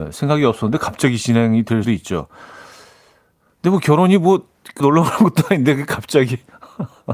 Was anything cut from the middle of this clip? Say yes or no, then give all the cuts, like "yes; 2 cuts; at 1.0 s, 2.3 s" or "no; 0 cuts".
yes; 2 cuts; at 1.8 s, 4.8 s